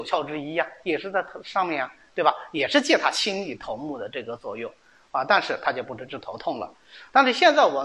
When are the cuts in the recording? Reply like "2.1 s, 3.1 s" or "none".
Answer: none